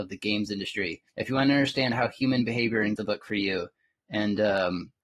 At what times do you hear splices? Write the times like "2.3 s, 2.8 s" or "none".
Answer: 1.1 s, 3.0 s